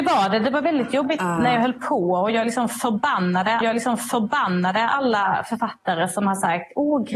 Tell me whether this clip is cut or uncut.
cut